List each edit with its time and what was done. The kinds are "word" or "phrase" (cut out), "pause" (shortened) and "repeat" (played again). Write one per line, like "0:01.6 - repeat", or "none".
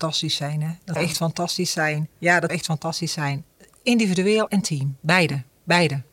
0:01.0 - word
0:02.5 - word
0:04.5 - word